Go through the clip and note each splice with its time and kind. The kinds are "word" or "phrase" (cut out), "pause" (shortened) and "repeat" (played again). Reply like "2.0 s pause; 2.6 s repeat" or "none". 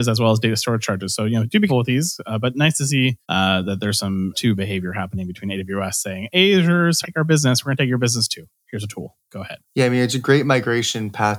1.7 s word; 3.2 s pause; 4.3 s word; 7.0 s word; 9.7 s pause